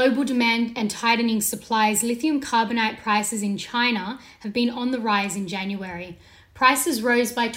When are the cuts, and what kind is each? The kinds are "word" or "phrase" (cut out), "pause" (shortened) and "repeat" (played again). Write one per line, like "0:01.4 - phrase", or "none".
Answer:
none

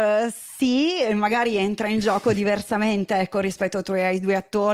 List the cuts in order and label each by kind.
none

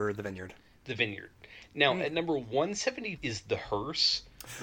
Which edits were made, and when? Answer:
0:03.2 - word

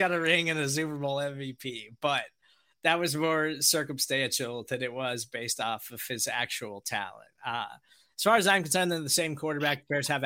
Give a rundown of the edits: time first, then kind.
none

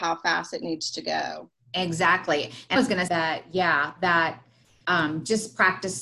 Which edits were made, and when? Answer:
0:02.8 - word
0:03.1 - word

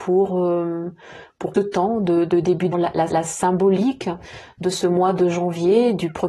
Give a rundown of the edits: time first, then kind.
0:01.5 - phrase
0:02.7 - phrase
0:03.1 - repeat

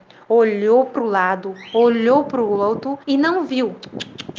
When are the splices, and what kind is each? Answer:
0:03.0 - pause

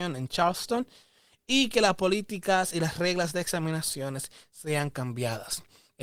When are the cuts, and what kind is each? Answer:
none

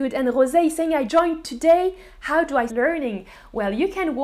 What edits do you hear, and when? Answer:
0:01.1 - word
0:02.7 - word

